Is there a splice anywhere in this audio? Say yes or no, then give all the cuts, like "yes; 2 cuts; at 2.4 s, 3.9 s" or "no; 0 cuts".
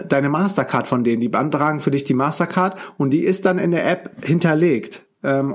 no; 0 cuts